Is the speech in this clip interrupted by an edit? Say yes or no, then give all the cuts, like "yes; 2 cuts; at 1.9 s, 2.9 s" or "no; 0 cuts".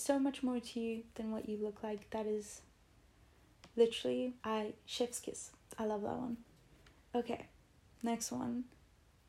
yes; 2 cuts; at 4.4 s, 6.6 s